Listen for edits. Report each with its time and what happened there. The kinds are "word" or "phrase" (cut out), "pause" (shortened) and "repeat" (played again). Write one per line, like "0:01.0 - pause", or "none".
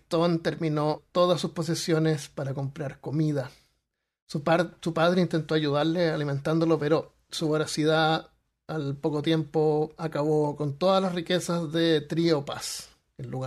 0:01.0 - word